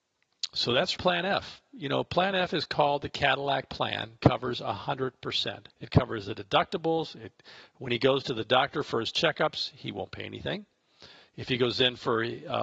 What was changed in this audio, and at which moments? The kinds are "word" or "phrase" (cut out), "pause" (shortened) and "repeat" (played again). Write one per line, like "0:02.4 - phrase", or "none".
0:01.0 - word
0:04.2 - phrase
0:05.7 - pause